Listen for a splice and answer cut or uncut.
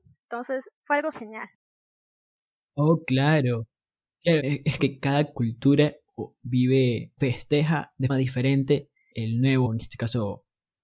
cut